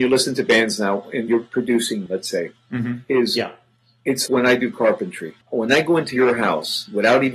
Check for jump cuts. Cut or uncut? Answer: cut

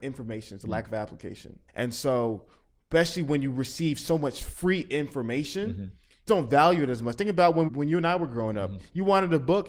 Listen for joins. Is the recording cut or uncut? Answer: cut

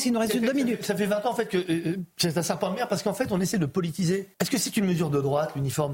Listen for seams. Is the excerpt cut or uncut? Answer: cut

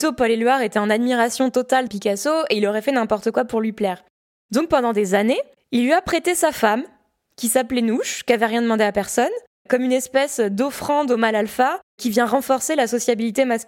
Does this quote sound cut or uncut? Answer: cut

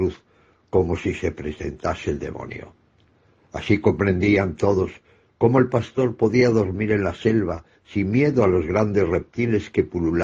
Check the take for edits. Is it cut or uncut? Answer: uncut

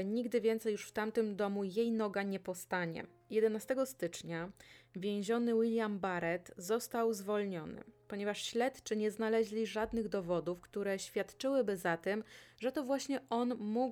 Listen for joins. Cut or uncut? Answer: uncut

